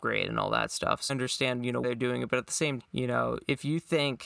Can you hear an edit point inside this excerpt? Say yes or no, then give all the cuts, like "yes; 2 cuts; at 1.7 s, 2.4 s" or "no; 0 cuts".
yes; 3 cuts; at 1.1 s, 1.8 s, 2.8 s